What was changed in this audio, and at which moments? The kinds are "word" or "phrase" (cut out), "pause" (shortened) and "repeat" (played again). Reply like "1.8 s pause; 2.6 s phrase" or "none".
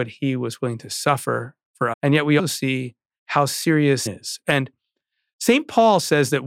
1.9 s word; 2.4 s word; 4.1 s word

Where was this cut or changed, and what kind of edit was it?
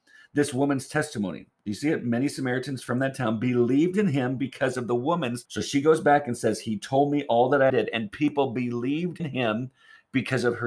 5.5 s word; 7.7 s word; 9.2 s word

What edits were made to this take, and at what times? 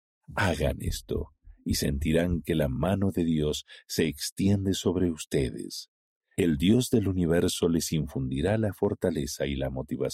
none

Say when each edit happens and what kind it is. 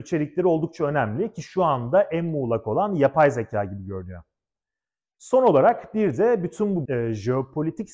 6.8 s word

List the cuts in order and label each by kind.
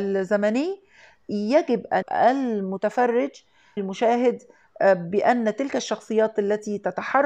2.0 s word; 3.8 s word

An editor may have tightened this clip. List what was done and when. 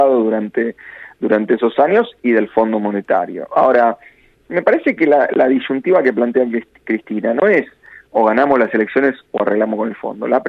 none

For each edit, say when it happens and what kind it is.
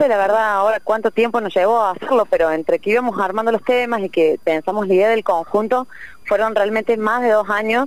none

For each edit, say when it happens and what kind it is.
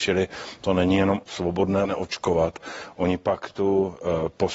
1.2 s word; 1.8 s phrase

